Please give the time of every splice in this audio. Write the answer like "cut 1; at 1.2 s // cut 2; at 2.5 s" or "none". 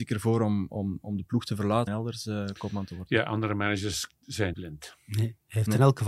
cut 1; at 1.9 s // cut 2; at 4.5 s